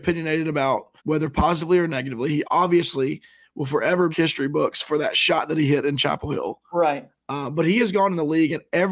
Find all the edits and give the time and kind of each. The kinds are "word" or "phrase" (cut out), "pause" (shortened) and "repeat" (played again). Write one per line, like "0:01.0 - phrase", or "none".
0:01.0 - pause
0:02.4 - word
0:04.1 - phrase